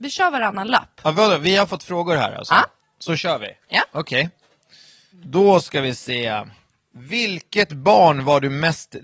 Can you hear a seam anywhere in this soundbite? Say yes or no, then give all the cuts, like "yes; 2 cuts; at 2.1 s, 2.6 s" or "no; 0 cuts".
no; 0 cuts